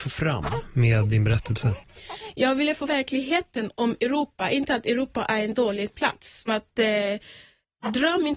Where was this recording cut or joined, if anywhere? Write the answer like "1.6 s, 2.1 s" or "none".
2.9 s, 6.5 s